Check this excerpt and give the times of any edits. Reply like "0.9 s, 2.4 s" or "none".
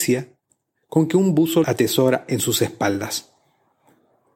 1.6 s

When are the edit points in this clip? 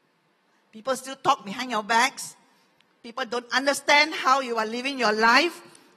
none

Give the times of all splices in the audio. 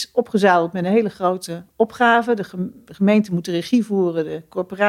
none

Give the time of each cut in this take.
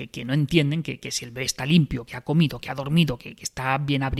none

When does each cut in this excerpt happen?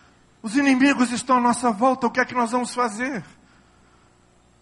none

